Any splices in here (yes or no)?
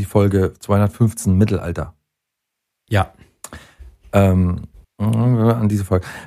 yes